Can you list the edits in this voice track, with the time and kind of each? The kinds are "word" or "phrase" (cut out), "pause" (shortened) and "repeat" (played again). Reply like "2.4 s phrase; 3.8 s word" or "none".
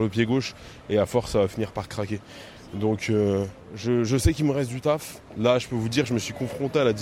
5.3 s pause